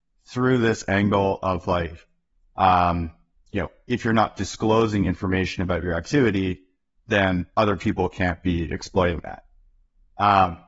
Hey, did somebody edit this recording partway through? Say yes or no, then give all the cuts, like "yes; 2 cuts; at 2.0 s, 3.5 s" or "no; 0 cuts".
no; 0 cuts